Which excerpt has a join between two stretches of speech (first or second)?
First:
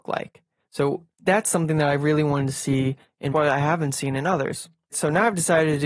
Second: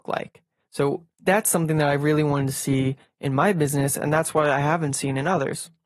first